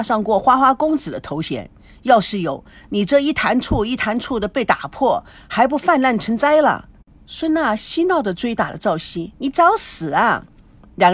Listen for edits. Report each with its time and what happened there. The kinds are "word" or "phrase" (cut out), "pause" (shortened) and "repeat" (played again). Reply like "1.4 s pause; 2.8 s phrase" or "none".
none